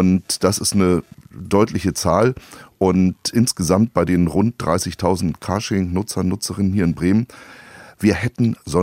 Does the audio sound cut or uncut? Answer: uncut